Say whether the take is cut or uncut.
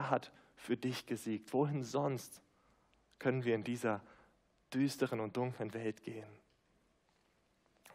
uncut